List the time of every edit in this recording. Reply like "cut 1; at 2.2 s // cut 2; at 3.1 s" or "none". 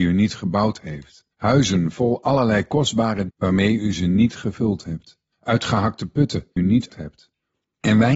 cut 1; at 1.3 s // cut 2; at 3.3 s // cut 3; at 5.3 s // cut 4; at 6.6 s // cut 5; at 6.9 s